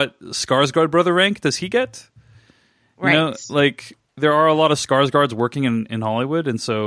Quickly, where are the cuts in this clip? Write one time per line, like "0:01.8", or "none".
none